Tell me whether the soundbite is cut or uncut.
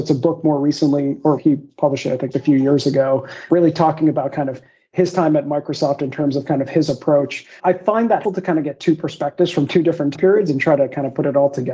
cut